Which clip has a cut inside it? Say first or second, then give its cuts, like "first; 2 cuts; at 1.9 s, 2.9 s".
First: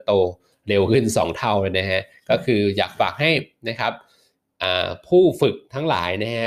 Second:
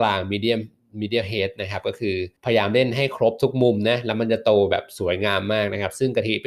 second; 1 cut; at 2.4 s